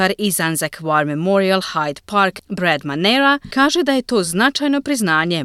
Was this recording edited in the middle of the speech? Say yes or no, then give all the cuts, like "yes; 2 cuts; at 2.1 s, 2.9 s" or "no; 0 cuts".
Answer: no; 0 cuts